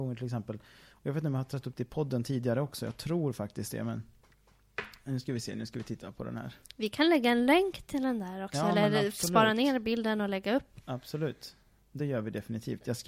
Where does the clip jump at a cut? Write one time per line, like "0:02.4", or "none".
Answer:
none